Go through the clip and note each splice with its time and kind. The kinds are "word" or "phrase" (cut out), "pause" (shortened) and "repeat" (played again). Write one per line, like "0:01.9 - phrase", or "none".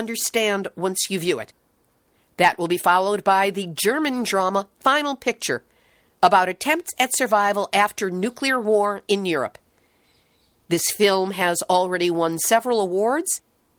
none